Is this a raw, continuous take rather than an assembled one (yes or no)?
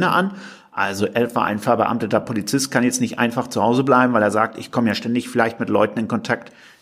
yes